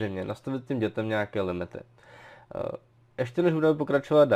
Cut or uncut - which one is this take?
uncut